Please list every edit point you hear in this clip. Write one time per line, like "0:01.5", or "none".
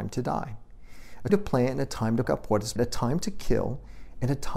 0:01.3
0:02.2
0:02.8

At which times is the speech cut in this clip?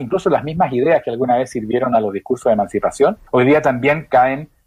0:03.3

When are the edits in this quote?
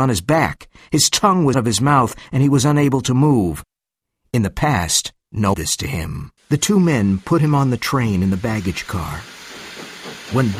0:01.5
0:05.5
0:06.4

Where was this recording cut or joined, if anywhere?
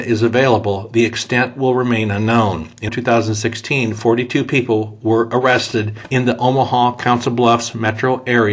0:02.9

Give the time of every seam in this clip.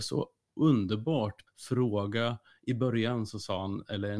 0:01.5

